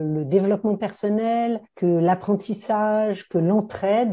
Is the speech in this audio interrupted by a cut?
yes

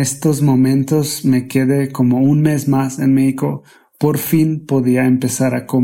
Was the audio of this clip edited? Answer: no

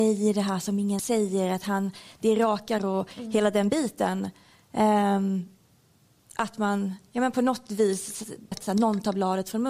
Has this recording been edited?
yes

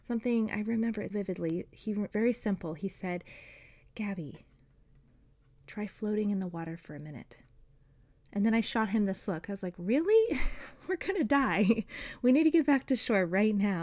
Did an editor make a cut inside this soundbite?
yes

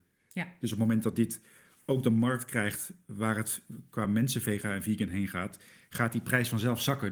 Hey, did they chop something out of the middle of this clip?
no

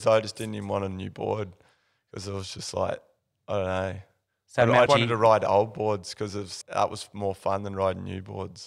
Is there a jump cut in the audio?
yes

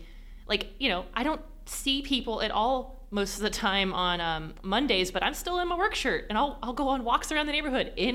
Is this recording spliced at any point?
no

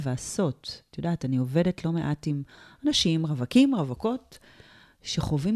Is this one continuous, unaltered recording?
yes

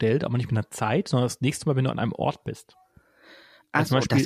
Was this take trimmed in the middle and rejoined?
no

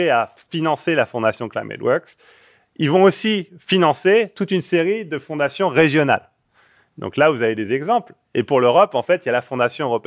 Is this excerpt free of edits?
yes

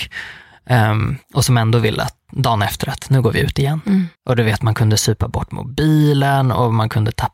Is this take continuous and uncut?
no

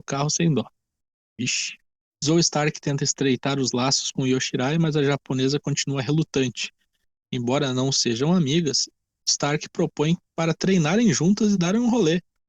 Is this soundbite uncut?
yes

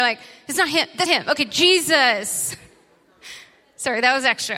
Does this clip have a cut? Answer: yes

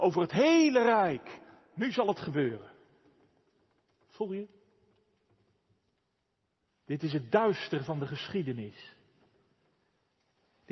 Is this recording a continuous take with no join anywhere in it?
yes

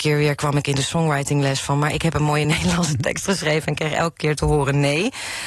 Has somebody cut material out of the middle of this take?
no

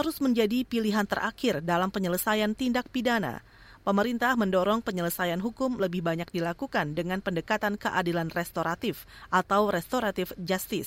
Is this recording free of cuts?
yes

